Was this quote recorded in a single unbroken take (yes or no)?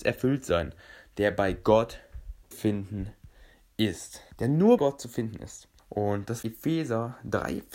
no